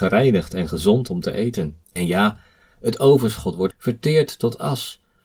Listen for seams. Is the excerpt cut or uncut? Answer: cut